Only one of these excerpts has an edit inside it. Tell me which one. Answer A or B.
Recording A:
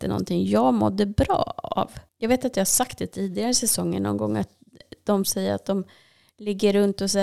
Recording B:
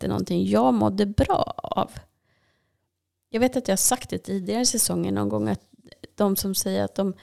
A